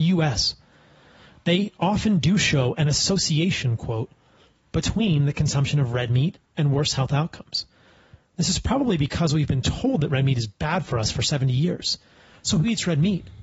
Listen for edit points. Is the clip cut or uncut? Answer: uncut